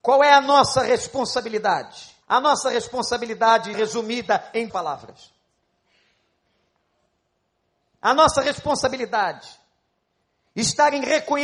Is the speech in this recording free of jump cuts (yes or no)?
no